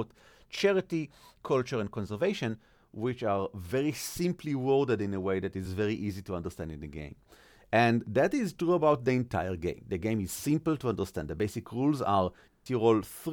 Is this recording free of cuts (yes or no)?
yes